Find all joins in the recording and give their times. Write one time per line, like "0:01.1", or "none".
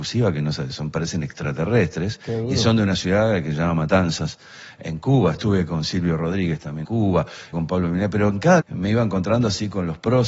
0:06.8
0:07.5
0:08.6